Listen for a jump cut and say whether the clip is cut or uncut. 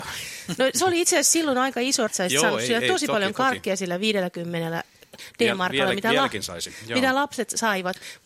cut